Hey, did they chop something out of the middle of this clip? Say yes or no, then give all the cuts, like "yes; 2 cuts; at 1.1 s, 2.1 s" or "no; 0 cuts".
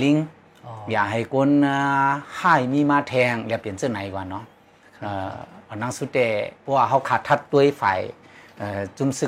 yes; 2 cuts; at 5.6 s, 6.6 s